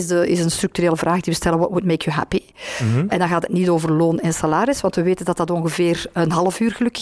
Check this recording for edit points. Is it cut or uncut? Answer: uncut